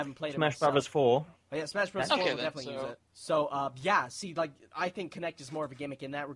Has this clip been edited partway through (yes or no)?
yes